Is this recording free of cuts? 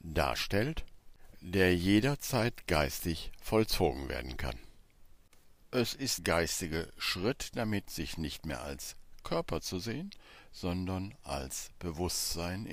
no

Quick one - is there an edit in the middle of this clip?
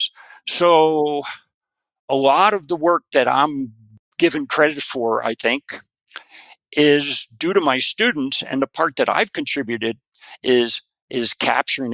no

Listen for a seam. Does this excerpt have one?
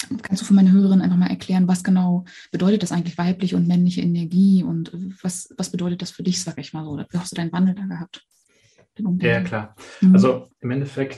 no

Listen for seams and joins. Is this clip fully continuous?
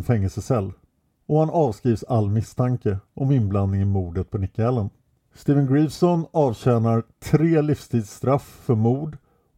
yes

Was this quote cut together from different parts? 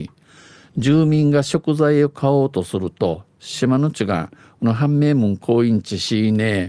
no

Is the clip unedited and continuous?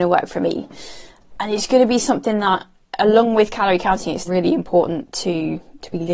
no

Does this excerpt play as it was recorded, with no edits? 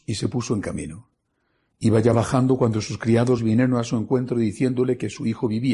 yes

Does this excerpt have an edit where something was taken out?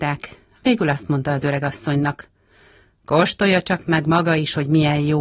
no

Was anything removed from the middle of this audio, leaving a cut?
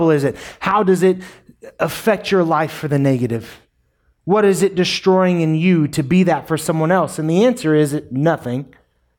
no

